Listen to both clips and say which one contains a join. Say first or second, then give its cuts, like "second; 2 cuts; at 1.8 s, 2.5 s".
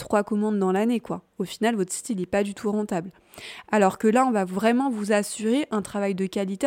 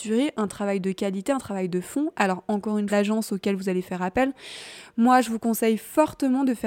second; 1 cut; at 2.9 s